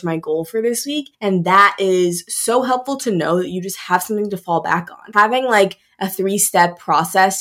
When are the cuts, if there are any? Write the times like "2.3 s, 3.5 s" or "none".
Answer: 1.1 s